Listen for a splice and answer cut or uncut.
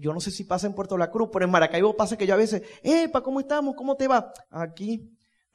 cut